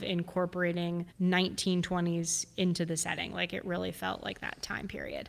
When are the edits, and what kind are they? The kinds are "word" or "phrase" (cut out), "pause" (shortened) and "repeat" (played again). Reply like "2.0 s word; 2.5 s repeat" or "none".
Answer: 1.1 s pause